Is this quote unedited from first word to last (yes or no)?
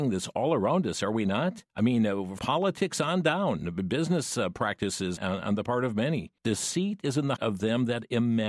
no